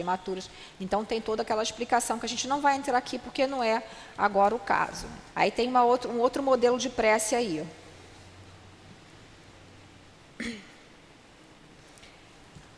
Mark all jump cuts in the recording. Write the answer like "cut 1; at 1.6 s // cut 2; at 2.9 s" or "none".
cut 1; at 5.3 s